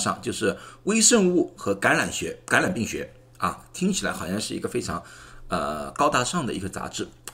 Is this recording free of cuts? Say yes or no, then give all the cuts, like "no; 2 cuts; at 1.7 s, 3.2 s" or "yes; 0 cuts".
yes; 0 cuts